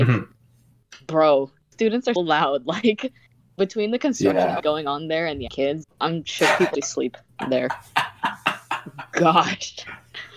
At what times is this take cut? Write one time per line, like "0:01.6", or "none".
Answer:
0:01.7
0:02.2
0:04.6
0:05.5
0:05.8
0:06.7